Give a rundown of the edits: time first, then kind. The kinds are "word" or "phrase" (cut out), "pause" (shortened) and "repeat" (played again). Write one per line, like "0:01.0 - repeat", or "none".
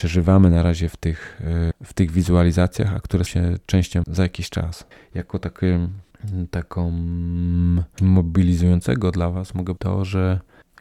0:01.7 - word
0:03.3 - word
0:04.0 - word
0:08.0 - word
0:09.8 - word